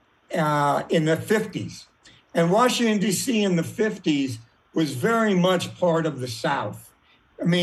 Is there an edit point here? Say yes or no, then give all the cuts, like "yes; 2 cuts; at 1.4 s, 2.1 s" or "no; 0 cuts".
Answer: no; 0 cuts